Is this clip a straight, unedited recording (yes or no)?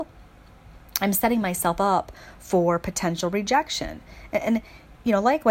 yes